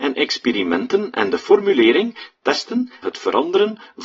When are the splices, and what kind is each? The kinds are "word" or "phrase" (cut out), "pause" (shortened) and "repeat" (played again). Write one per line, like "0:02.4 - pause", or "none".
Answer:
0:03.0 - word